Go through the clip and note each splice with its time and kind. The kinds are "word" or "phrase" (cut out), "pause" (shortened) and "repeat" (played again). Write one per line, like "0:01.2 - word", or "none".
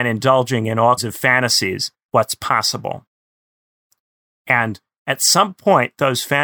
0:01.0 - word
0:02.1 - word